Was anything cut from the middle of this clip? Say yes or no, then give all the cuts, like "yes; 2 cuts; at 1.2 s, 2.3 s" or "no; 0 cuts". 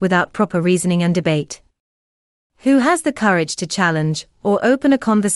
no; 0 cuts